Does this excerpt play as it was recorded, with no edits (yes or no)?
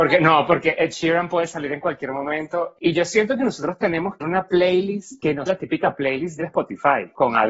no